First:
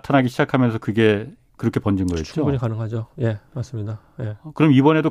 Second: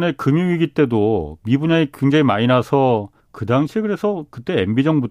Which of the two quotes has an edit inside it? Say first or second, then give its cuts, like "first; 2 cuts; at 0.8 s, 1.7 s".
second; 1 cut; at 3.2 s